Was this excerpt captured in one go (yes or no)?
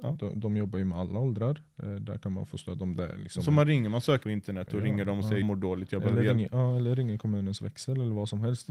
no